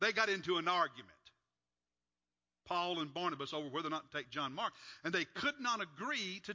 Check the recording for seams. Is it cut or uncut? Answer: uncut